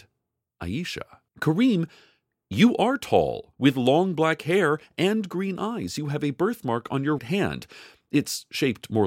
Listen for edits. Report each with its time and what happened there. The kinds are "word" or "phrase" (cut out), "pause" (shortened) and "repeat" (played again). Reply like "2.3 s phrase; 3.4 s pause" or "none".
1.3 s pause; 3.5 s pause; 7.2 s word